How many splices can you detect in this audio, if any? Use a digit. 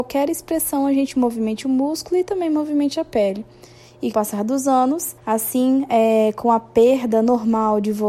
2